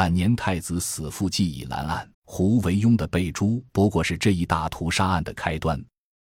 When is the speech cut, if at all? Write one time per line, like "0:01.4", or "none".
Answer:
0:02.1
0:03.7